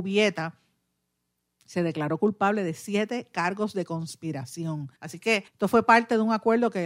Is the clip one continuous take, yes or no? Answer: no